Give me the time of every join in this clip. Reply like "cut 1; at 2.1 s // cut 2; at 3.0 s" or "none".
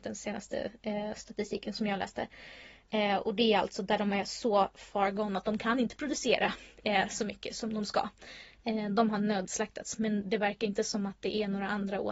none